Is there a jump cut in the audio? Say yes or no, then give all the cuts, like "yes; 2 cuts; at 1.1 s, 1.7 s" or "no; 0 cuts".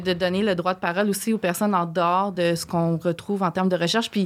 no; 0 cuts